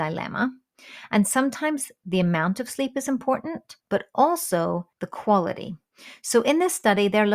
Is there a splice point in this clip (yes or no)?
yes